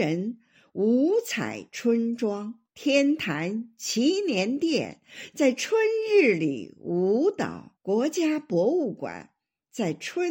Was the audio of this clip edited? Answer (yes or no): yes